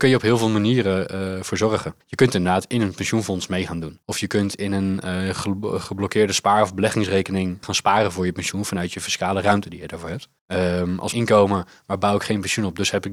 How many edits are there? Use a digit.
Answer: 5